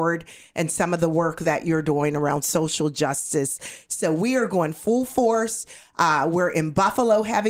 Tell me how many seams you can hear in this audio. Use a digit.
0